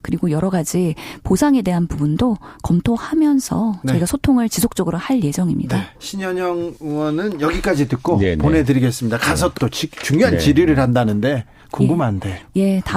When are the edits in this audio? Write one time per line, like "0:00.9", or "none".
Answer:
0:05.9
0:09.6